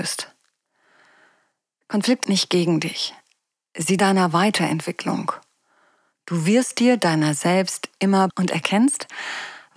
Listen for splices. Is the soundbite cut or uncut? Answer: cut